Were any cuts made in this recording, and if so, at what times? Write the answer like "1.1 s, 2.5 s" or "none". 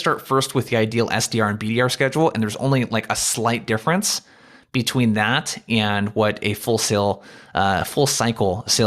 none